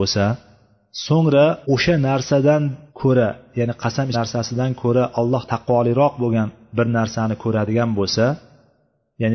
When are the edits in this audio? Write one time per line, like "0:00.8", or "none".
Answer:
0:01.6
0:02.9
0:04.1
0:05.5